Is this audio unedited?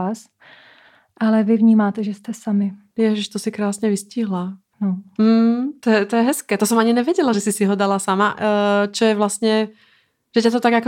yes; 0 cuts

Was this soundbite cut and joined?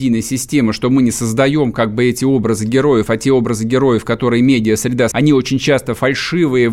yes; 1 cut; at 5.1 s

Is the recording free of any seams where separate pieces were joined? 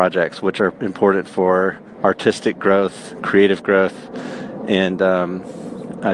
yes; 0 cuts

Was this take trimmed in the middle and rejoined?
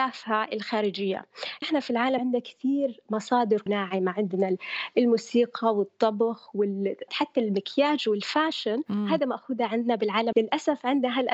yes; 5 cuts; at 1.6 s, 2.2 s, 3.7 s, 7.1 s, 10.3 s

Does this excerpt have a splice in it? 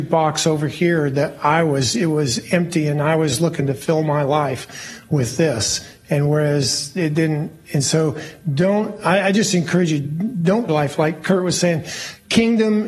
yes; 1 cut; at 10.7 s

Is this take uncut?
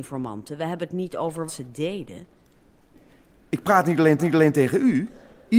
no; 2 cuts; at 1.5 s, 4.2 s

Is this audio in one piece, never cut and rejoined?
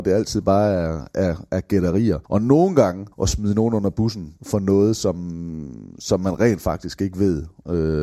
no; 3 cuts; at 2.3 s, 3.1 s, 4.4 s

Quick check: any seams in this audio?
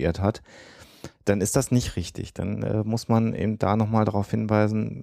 no; 0 cuts

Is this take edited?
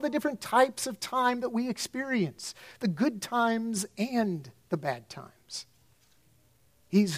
no; 0 cuts

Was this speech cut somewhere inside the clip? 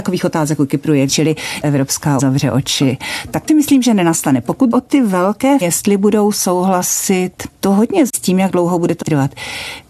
yes; 8 cuts; at 1.1 s, 1.6 s, 2.2 s, 3.5 s, 4.7 s, 5.6 s, 8.1 s, 9.0 s

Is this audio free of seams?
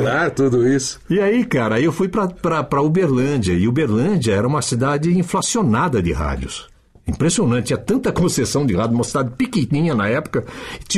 yes; 0 cuts

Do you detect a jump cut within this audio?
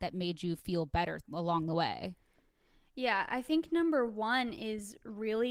no; 0 cuts

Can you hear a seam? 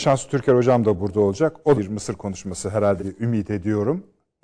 yes; 2 cuts; at 1.7 s, 3.0 s

